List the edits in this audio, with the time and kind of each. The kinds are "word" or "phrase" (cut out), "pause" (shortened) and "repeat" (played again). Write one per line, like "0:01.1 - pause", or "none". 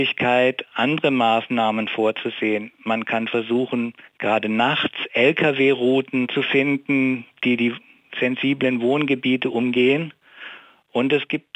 0:04.1 - pause